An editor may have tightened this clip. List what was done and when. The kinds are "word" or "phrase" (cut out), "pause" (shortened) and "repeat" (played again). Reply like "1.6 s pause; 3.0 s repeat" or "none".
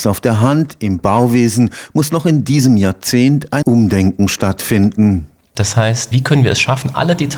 3.6 s word

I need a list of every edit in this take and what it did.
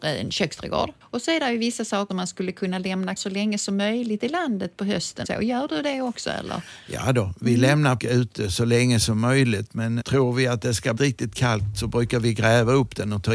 2.1 s word; 3.2 s word; 5.2 s phrase; 8.0 s word; 10.0 s word; 11.0 s phrase

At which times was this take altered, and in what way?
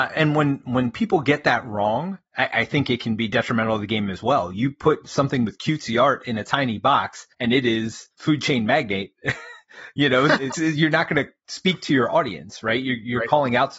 2.3 s pause; 7.3 s pause; 8.1 s pause; 10.5 s word

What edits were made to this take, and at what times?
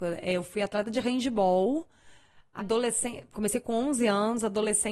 2.6 s word

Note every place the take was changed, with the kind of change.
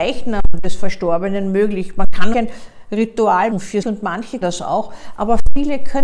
2.3 s word; 3.5 s word; 3.8 s word; 4.4 s word

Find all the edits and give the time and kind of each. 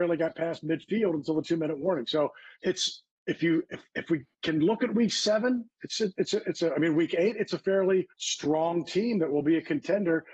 2.5 s pause; 8.1 s pause

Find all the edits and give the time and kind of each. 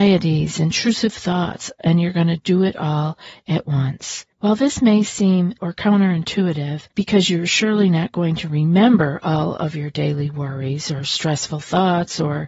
4.3 s pause; 5.6 s word; 6.9 s pause

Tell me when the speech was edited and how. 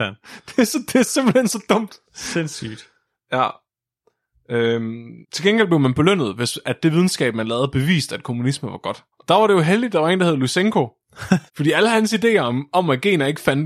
2.0 s pause; 5.2 s pause; 9.1 s pause; 11.5 s pause

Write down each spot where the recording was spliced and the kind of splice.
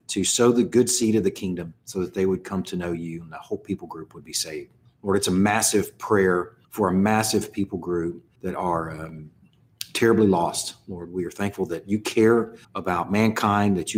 4.9 s pause; 6.6 s pause; 8.3 s pause; 12.6 s pause

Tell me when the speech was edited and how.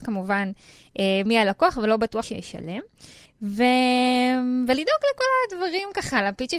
2.2 s phrase; 3.2 s pause

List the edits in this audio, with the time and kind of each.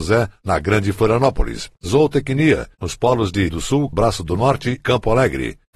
1.8 s pause; 3.5 s word; 3.9 s phrase; 4.8 s word

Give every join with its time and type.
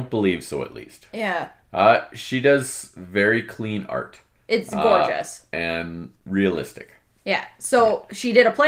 none

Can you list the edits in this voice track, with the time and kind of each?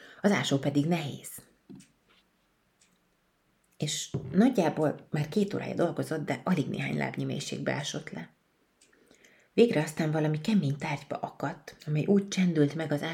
none

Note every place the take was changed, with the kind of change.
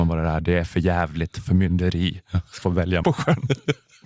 2.6 s phrase; 3.0 s word

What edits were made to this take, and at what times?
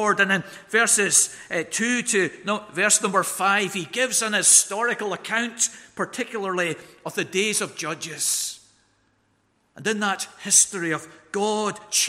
none

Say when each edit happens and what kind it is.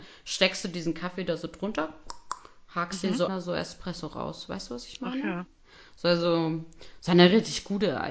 3.3 s phrase

